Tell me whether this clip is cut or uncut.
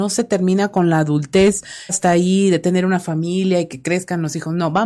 cut